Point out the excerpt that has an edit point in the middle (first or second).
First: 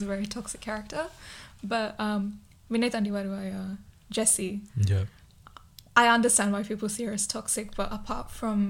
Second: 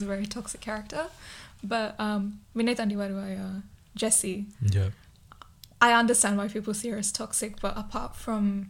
second